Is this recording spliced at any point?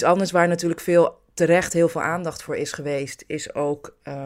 no; 0 cuts

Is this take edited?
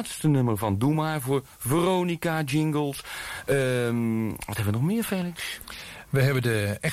no; 0 cuts

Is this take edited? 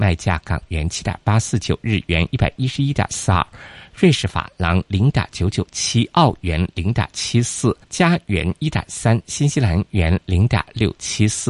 yes; 1 cut; at 7.8 s

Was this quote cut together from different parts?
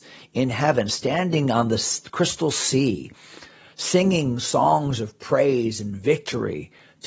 no; 0 cuts

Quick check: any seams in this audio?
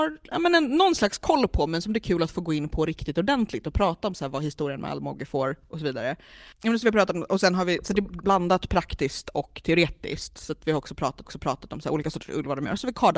yes; 2 cuts; at 8.2 s, 11.2 s

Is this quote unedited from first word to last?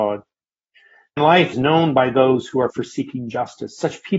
no; 3 cuts; at 1.2 s, 1.5 s, 2.7 s

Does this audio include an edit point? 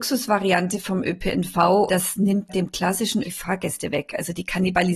yes; 3 cuts; at 1.9 s, 2.5 s, 3.2 s

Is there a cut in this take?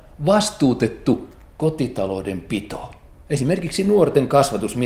no; 0 cuts

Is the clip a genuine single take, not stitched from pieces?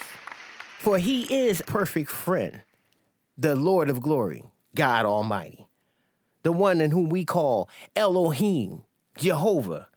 no; 1 cut; at 1.6 s

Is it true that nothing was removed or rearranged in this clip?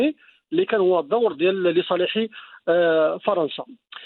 yes; 0 cuts

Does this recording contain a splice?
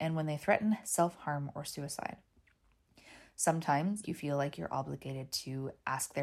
yes; 1 cut; at 4.0 s

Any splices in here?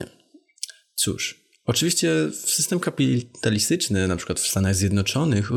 no; 0 cuts

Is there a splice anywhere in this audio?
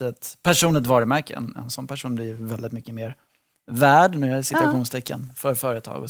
no; 0 cuts

